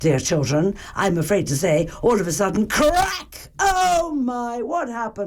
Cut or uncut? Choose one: uncut